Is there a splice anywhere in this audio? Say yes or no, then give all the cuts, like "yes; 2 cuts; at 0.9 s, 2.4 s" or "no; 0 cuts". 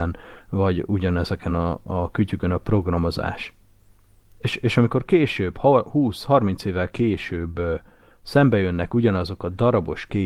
no; 0 cuts